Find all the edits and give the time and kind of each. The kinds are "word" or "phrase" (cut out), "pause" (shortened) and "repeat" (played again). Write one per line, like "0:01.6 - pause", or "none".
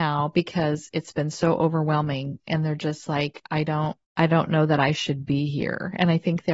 0:04.0 - pause